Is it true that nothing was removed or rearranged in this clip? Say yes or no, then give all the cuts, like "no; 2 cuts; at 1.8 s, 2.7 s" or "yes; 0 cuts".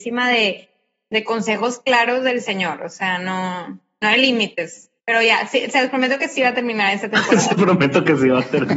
no; 2 cuts; at 5.0 s, 7.5 s